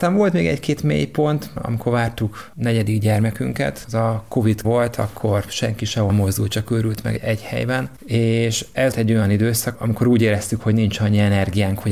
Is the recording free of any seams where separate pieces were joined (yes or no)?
no